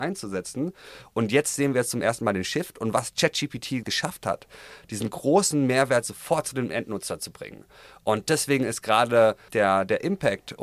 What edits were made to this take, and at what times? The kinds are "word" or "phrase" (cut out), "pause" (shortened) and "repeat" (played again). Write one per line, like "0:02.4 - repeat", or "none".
0:03.8 - word
0:09.5 - word